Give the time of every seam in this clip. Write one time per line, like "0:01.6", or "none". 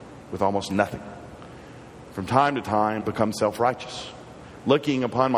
0:03.0

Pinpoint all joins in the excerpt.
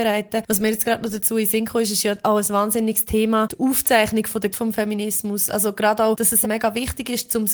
0:04.5
0:06.4

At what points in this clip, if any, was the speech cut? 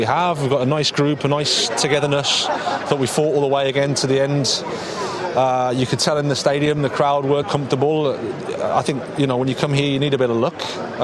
0:07.4

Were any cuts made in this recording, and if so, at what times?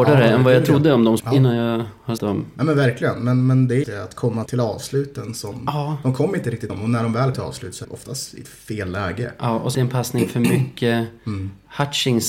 0:01.2
0:02.2
0:03.8
0:04.5
0:06.7
0:07.3
0:07.8
0:09.7

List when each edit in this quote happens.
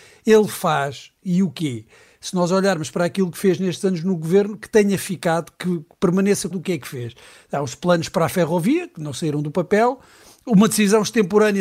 0:06.5

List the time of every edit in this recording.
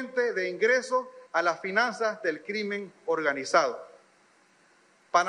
0:01.3

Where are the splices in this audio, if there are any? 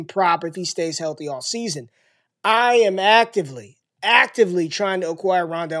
none

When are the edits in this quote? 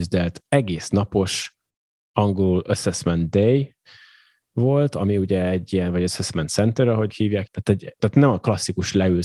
0:07.1
0:07.5
0:08.0

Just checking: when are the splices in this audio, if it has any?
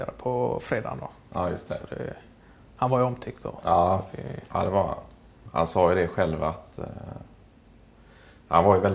none

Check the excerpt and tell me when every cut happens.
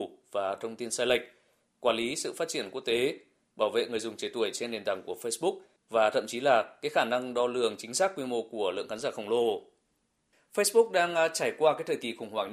none

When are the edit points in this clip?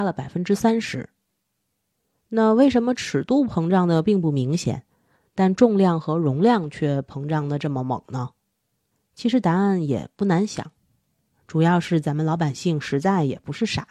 none

